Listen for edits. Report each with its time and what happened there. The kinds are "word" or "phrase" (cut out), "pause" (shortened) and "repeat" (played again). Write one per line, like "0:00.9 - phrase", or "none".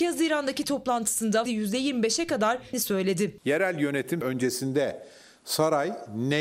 0:01.5 - word
0:02.7 - word
0:04.2 - word